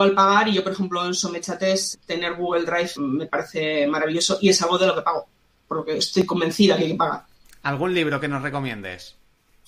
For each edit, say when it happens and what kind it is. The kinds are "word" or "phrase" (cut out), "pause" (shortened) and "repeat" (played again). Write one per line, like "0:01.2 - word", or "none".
0:01.9 - word
0:03.0 - word